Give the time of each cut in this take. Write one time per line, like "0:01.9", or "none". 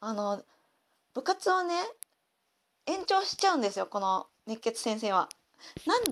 none